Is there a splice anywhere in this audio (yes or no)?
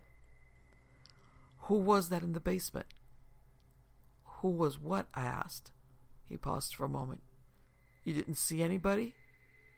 no